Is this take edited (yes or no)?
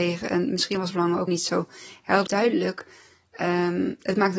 yes